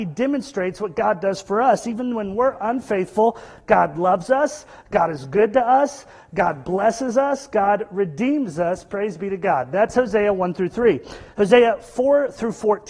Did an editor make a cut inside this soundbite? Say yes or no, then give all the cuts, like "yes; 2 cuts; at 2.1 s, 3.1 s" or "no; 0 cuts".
no; 0 cuts